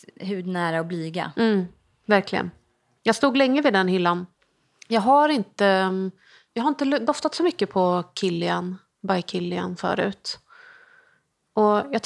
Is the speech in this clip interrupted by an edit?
no; 0 cuts

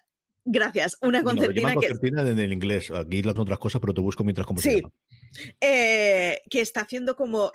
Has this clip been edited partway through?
yes; 2 cuts; at 3.4 s, 6.5 s

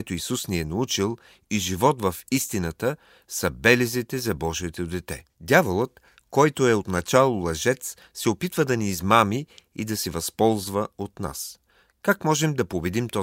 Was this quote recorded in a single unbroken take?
no; 1 cut; at 5.3 s

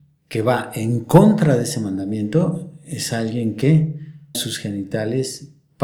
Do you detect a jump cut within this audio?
yes; 1 cut; at 4.3 s

